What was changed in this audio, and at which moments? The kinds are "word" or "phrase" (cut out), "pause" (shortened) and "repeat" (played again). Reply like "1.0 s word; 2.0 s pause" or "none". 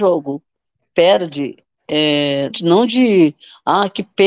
2.5 s word